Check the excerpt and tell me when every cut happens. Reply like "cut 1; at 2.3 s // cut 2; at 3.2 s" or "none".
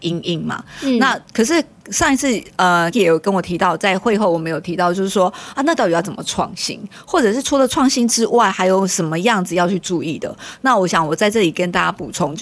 cut 1; at 2.9 s